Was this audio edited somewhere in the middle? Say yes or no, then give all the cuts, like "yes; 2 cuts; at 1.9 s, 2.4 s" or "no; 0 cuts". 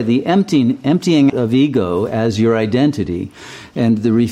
yes; 1 cut; at 1.3 s